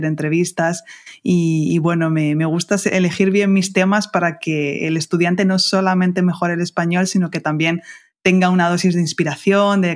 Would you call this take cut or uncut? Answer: uncut